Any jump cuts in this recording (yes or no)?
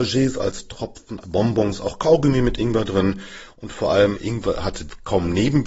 yes